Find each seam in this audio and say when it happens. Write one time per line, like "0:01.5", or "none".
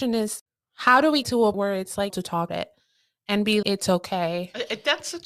0:01.2
0:01.5
0:02.1
0:02.5
0:03.6